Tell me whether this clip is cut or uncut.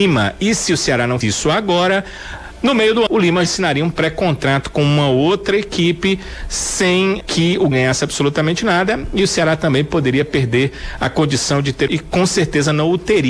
cut